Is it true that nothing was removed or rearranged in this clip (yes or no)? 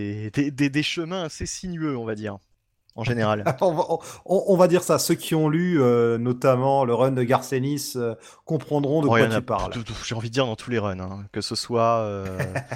yes